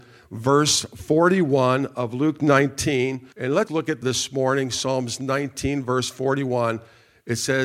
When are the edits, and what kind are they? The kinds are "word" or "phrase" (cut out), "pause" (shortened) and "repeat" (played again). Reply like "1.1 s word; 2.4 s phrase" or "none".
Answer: 3.3 s pause; 3.7 s word; 4.0 s phrase